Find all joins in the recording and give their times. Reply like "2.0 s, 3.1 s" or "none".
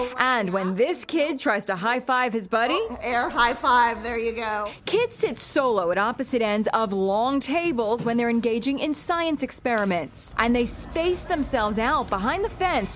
none